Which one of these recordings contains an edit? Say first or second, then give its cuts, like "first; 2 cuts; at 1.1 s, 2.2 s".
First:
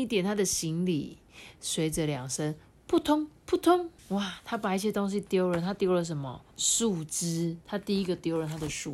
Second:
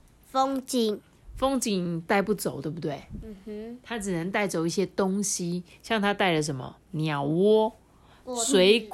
first; 4 cuts; at 3.4 s, 4.0 s, 6.5 s, 7.6 s